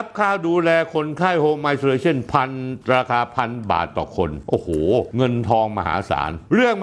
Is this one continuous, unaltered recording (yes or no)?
no